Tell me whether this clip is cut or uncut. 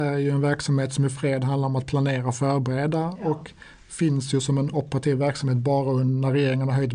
uncut